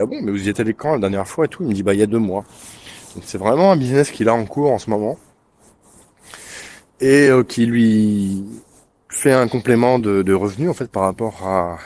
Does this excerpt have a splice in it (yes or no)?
no